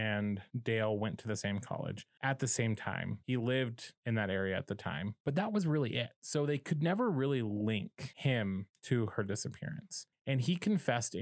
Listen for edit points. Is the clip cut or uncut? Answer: uncut